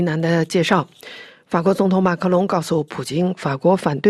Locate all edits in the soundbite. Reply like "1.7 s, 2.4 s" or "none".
none

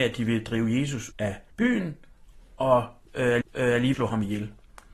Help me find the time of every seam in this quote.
1.1 s, 1.5 s, 3.4 s, 3.9 s

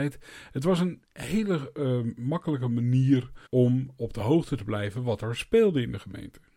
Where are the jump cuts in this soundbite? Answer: 3.5 s

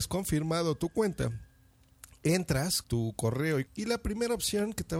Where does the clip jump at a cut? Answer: 2.8 s, 3.7 s

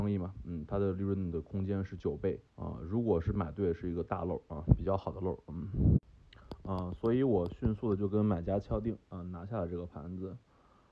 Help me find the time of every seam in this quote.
2.5 s

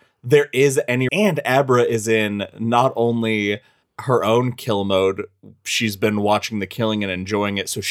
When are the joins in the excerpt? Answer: 1.1 s, 3.9 s

